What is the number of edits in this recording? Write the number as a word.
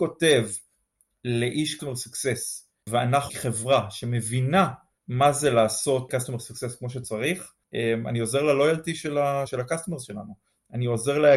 three